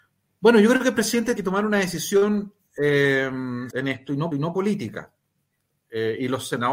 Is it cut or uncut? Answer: cut